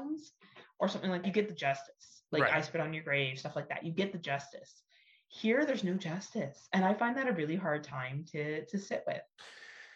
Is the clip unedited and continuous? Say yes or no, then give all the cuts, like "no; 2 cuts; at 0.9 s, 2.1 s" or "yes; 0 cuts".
no; 1 cut; at 1.2 s